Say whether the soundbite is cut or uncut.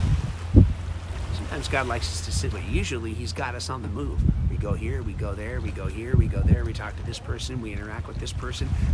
cut